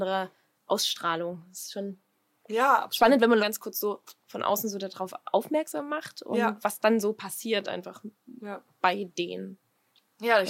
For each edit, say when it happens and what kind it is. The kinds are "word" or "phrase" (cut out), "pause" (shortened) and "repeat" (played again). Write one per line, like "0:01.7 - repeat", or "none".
0:03.4 - phrase